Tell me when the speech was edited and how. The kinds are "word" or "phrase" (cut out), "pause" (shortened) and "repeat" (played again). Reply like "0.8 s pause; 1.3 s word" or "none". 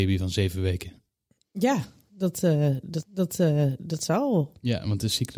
3.0 s repeat